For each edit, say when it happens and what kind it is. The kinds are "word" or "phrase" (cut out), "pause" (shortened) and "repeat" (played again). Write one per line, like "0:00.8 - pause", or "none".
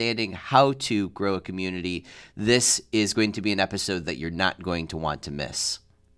none